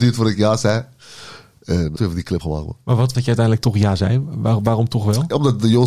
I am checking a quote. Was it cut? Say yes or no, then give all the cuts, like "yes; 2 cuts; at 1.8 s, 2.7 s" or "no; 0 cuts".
yes; 3 cuts; at 2.0 s, 2.4 s, 3.1 s